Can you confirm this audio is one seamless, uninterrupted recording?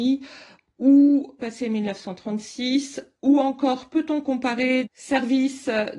no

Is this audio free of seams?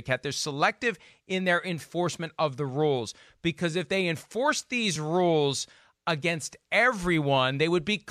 yes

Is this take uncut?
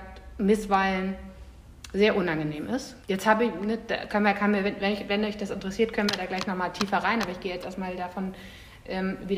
no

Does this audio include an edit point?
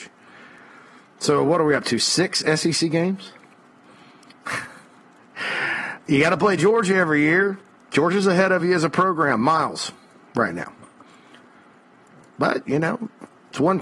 no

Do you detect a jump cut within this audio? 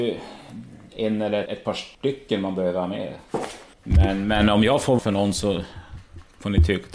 yes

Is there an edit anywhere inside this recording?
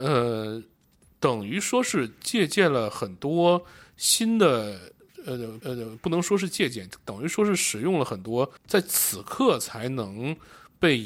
yes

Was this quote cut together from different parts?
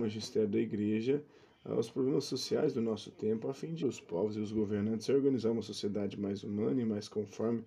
yes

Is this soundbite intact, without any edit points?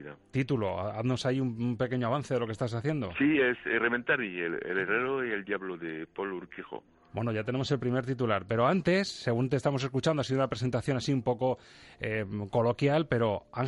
yes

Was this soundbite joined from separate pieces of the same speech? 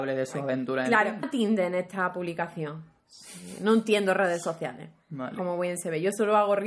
yes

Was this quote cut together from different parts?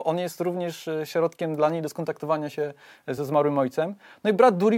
no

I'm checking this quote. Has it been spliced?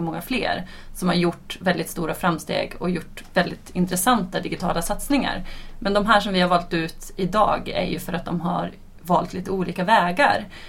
no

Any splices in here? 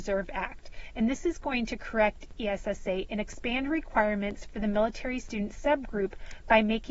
no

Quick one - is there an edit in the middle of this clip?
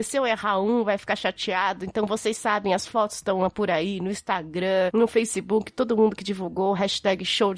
no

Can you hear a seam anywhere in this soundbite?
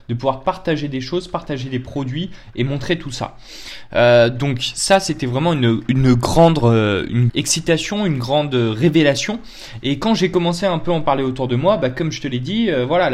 yes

